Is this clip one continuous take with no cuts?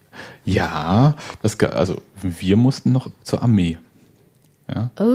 yes; 0 cuts

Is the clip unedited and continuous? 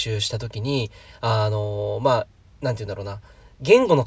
yes; 0 cuts

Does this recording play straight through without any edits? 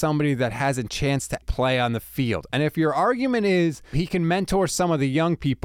no; 2 cuts; at 1.4 s, 3.9 s

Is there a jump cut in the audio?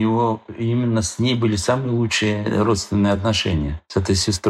no; 0 cuts

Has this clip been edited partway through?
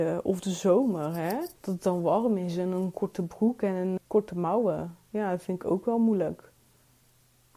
yes; 2 cuts; at 1.6 s, 4.0 s

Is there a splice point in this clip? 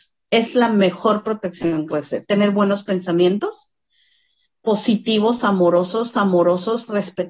yes; 2 cuts; at 1.9 s, 6.1 s

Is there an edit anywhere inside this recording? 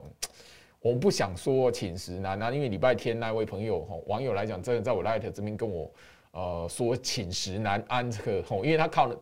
no; 0 cuts

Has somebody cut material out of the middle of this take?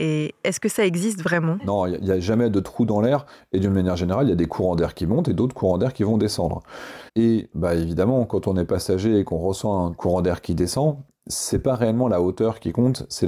yes; 1 cut; at 7.1 s

